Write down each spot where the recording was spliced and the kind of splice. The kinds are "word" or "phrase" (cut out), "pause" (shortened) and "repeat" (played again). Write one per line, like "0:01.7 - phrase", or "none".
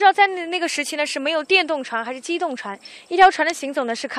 none